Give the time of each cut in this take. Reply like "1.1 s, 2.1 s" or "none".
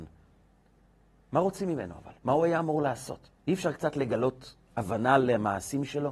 2.2 s, 3.4 s

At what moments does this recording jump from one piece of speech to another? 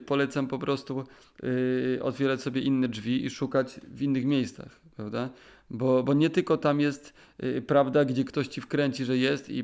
6.0 s

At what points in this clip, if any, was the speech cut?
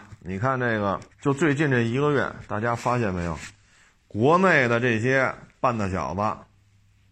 1.1 s

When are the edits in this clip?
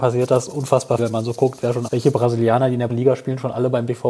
1.0 s, 1.9 s, 2.9 s

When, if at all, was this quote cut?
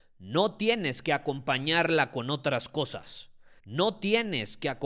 3.6 s

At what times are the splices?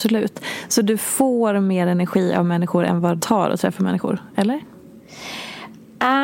3.2 s

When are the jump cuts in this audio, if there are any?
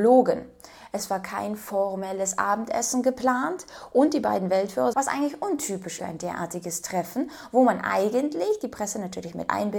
4.9 s, 6.0 s

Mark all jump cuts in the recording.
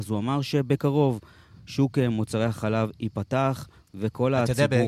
none

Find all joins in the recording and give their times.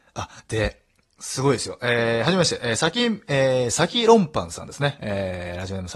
none

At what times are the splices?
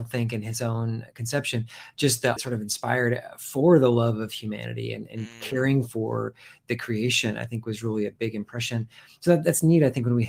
2.4 s

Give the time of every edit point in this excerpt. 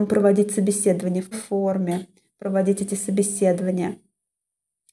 1.3 s

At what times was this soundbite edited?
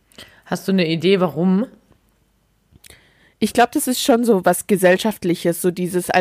none

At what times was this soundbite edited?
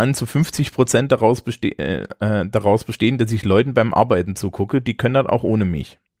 none

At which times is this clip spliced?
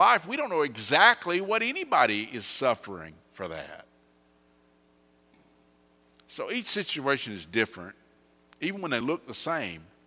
none

